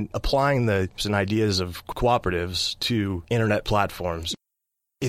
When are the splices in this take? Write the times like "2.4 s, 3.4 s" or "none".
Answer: 1.0 s